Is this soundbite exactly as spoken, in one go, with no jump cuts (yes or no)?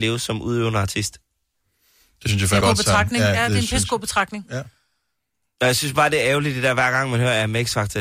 no